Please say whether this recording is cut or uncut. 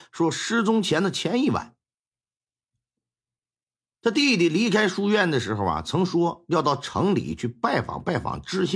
uncut